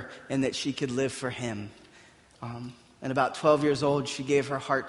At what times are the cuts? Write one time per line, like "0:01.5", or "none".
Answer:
none